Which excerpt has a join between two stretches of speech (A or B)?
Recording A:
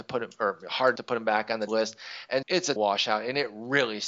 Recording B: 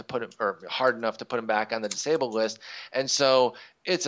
A